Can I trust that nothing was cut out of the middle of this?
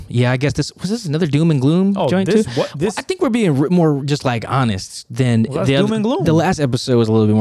yes; 0 cuts

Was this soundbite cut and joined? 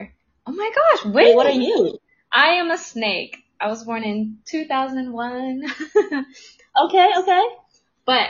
no; 0 cuts

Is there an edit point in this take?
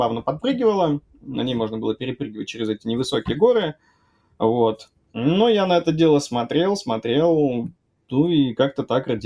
no; 0 cuts

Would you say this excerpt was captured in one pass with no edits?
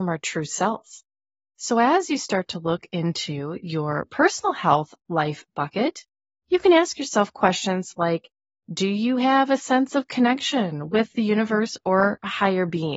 yes; 0 cuts

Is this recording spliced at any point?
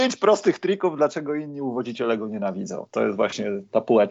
no; 0 cuts

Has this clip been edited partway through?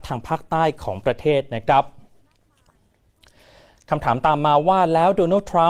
no; 0 cuts

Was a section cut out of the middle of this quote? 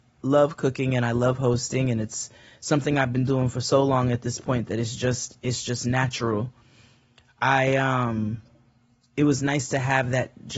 no; 0 cuts

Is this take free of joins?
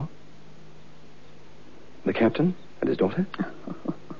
yes; 0 cuts

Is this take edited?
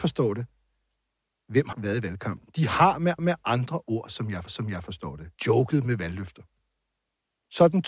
yes; 4 cuts; at 1.7 s, 3.2 s, 4.5 s, 5.4 s

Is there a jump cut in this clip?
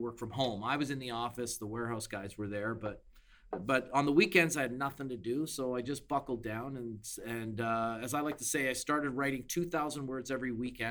no; 0 cuts

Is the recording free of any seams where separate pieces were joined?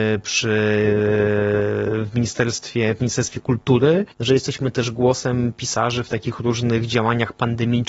no; 1 cut; at 4.1 s

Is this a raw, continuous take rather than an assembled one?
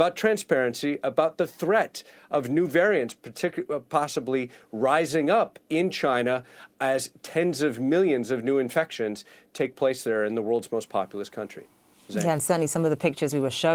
yes; 0 cuts

